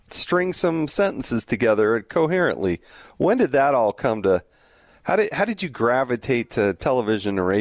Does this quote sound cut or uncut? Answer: uncut